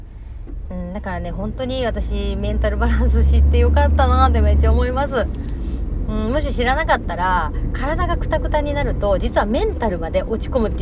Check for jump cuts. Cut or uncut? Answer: uncut